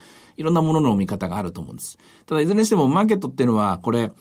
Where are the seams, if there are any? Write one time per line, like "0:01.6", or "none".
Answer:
none